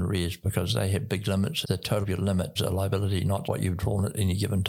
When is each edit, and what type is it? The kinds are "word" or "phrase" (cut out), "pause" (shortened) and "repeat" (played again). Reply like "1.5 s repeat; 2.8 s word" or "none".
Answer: 1.6 s phrase; 2.0 s word; 2.6 s word; 3.4 s word

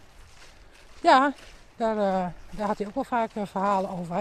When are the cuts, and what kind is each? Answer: none

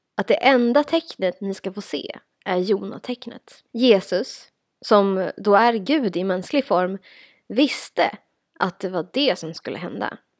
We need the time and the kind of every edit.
3.7 s pause

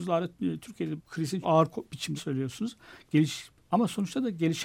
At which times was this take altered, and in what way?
1.0 s word; 1.4 s word; 2.2 s word

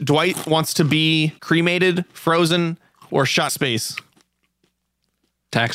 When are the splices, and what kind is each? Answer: 1.4 s pause; 3.1 s word; 3.5 s word

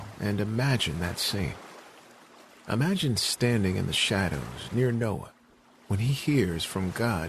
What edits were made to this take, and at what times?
none

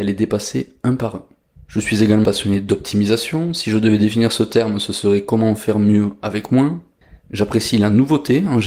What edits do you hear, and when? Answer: 2.2 s word

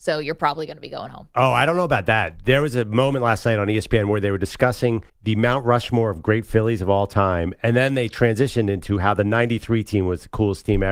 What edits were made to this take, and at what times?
5.1 s pause

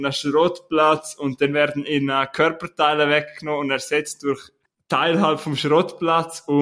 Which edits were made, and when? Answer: 4.7 s pause

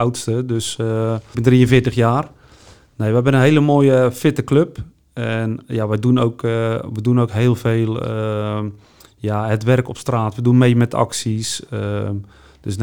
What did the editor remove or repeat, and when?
1.3 s word

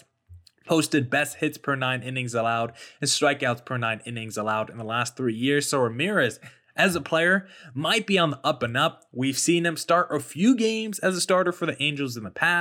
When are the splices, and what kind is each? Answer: none

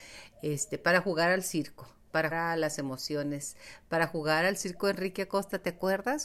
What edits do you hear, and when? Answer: 2.3 s word

